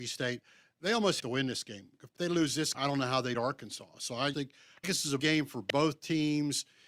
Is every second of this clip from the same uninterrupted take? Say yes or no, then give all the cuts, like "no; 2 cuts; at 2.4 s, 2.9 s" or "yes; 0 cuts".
no; 7 cuts; at 1.2 s, 2.2 s, 2.7 s, 3.3 s, 4.3 s, 4.8 s, 5.2 s